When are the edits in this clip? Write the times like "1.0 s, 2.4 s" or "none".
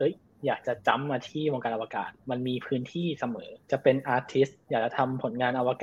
2.2 s, 3.6 s